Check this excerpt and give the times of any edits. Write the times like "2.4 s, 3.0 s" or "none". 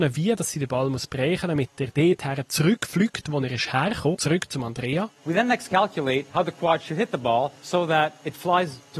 4.1 s, 5.1 s, 7.6 s